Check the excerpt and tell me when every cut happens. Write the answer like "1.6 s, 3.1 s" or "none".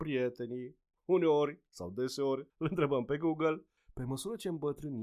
2.5 s